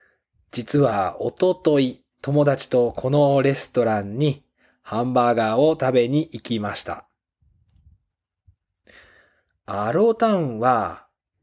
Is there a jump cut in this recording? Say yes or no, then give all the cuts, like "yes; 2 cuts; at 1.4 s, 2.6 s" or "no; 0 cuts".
yes; 1 cut; at 2.1 s